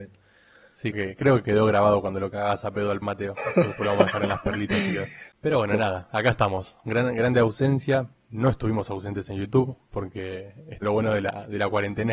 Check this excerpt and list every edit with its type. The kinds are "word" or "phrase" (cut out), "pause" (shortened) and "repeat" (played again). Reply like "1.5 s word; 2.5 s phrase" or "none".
0.9 s word; 3.0 s word; 10.8 s word